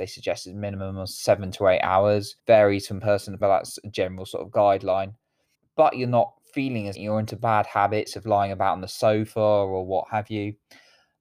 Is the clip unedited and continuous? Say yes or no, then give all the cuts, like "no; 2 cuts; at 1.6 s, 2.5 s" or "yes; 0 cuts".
no; 4 cuts; at 2.4 s, 3.4 s, 5.5 s, 6.9 s